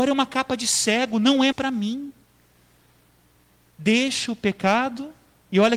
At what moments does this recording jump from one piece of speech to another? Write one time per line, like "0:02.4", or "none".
0:01.5